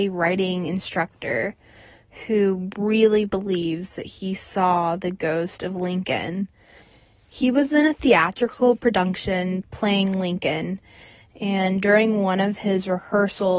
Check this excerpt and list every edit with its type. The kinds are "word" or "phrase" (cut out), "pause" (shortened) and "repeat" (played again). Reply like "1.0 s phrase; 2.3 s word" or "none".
none